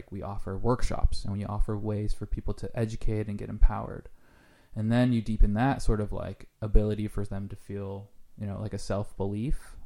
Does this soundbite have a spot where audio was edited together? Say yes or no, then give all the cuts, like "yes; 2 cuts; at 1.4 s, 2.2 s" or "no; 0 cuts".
no; 0 cuts